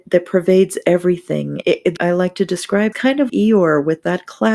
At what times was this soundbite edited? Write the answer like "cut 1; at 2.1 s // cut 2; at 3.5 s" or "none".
cut 1; at 1.6 s // cut 2; at 2.0 s // cut 3; at 2.9 s // cut 4; at 3.3 s